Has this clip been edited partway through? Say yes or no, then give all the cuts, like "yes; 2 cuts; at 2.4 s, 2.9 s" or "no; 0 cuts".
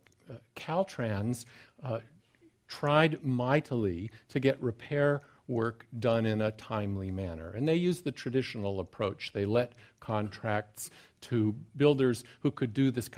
no; 0 cuts